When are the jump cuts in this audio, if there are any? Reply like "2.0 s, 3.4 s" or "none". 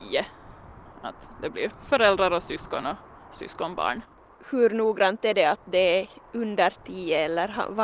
none